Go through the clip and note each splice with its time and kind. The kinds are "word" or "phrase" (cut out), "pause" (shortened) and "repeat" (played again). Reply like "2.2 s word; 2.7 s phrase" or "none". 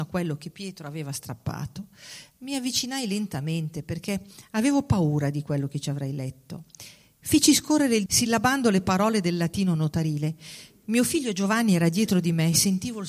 8.1 s phrase